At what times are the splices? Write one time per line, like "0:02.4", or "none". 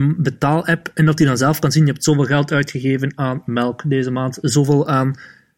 none

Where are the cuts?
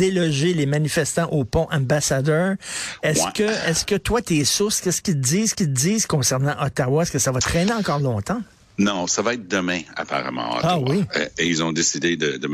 0:05.5

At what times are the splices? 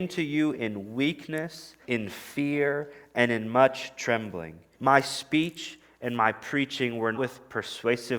0:01.8
0:04.7
0:07.1

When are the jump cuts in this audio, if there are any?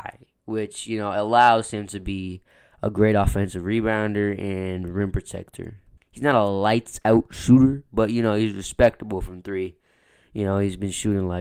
0:06.0

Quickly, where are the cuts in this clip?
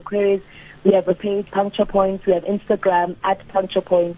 0:01.2
0:01.5
0:02.4

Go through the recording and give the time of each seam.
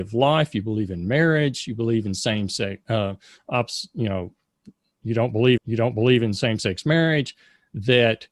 0:05.6

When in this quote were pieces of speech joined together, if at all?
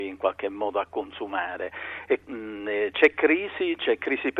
0:02.2

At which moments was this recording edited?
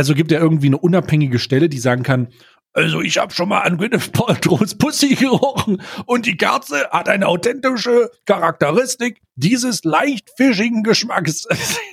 none

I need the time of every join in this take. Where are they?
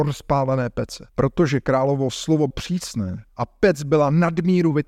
0:01.1
0:02.5
0:03.3

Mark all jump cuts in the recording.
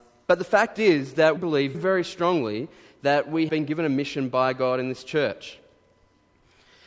0:01.4
0:01.7
0:03.5

